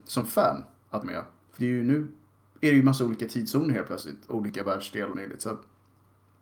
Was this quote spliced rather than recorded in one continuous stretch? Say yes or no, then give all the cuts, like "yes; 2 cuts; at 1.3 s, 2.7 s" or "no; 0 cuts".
yes; 4 cuts; at 1.0 s, 1.6 s, 4.3 s, 5.1 s